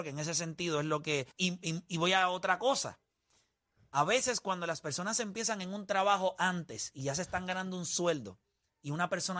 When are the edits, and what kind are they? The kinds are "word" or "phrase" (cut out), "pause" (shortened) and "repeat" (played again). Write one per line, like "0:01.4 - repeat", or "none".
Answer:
0:01.3 - pause